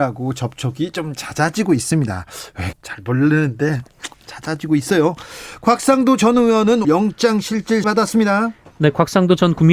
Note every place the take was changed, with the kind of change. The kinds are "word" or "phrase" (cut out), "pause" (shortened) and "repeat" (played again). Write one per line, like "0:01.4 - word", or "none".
0:02.7 - word
0:04.1 - word
0:06.8 - word
0:07.8 - word